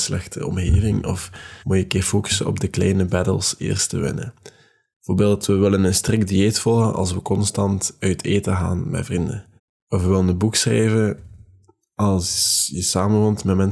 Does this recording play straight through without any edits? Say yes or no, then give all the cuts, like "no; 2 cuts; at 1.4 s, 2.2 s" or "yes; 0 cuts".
no; 2 cuts; at 1.6 s, 9.6 s